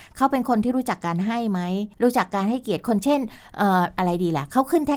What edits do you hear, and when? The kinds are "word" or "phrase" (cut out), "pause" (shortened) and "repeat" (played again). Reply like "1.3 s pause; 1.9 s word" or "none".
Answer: 1.9 s pause